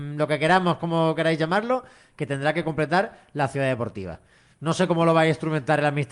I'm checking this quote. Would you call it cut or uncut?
uncut